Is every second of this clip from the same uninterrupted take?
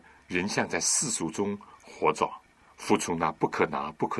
no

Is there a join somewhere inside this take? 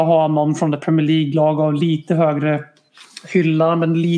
no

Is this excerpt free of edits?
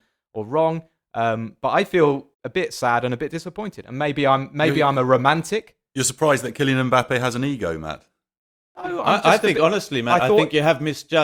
no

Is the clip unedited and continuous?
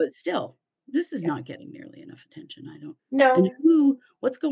no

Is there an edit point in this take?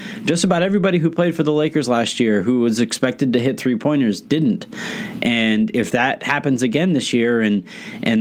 no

